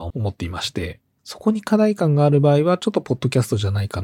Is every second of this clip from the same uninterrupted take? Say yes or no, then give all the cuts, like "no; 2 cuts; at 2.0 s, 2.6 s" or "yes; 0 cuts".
yes; 0 cuts